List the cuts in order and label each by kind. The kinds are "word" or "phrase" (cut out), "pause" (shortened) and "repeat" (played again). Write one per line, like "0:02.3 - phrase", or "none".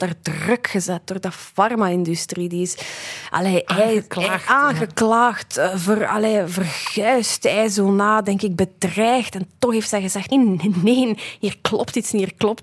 0:10.3 - word